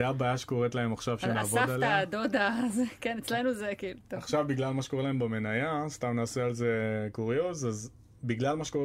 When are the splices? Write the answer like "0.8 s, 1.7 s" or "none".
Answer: 1.3 s

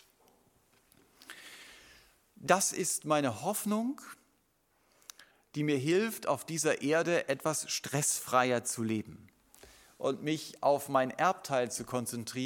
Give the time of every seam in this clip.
none

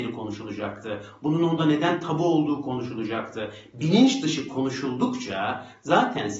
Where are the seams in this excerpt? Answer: none

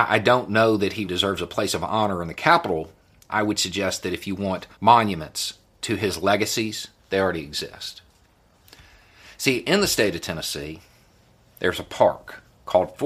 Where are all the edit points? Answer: 1.1 s, 3.3 s, 4.7 s, 7.0 s

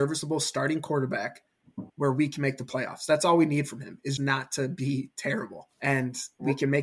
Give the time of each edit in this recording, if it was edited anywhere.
1.9 s, 4.2 s, 5.7 s

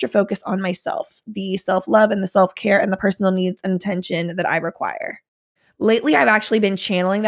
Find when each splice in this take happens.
none

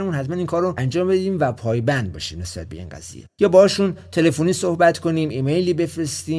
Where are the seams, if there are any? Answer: none

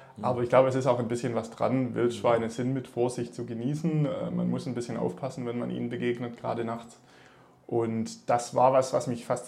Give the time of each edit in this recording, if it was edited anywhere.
none

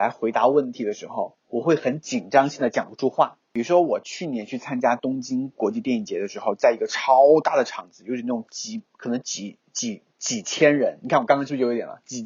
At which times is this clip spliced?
1.4 s, 3.4 s

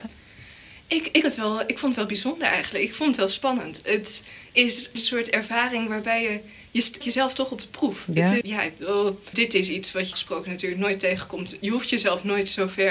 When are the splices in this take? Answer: 1.2 s, 5.0 s, 7.0 s, 8.4 s, 9.3 s, 10.1 s

